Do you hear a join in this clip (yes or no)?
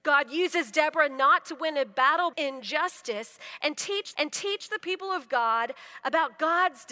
yes